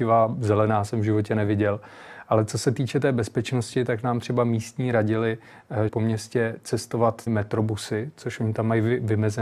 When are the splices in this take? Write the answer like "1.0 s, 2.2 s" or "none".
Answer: 5.9 s, 7.3 s